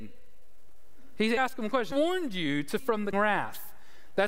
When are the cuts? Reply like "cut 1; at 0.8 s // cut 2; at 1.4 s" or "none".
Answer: cut 1; at 1.4 s // cut 2; at 1.9 s // cut 3; at 2.8 s // cut 4; at 3.1 s